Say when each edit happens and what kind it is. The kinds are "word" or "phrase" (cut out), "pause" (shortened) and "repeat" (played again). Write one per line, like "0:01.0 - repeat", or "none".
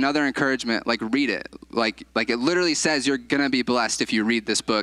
0:02.1 - pause